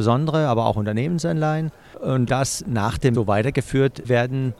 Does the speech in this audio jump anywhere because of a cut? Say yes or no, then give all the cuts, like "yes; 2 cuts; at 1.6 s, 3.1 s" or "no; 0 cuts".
yes; 2 cuts; at 2.3 s, 3.1 s